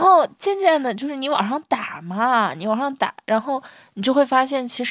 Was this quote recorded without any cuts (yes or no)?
yes